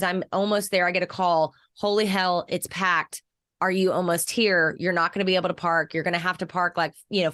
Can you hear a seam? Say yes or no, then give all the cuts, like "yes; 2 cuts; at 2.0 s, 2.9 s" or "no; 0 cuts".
no; 0 cuts